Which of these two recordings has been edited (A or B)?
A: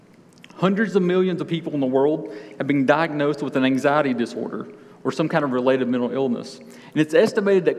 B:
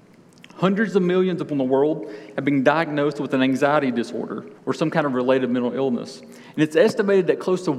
B